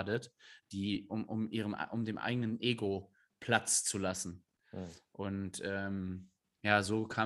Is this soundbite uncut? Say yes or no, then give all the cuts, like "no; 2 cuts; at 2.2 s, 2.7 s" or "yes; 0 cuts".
yes; 0 cuts